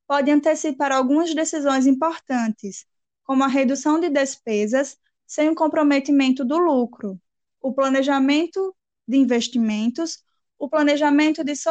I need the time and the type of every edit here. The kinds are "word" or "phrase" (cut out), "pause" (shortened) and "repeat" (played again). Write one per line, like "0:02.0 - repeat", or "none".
none